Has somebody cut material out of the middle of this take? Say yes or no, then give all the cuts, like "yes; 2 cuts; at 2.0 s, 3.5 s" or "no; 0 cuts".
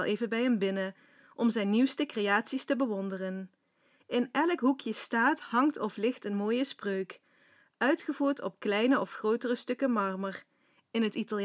no; 0 cuts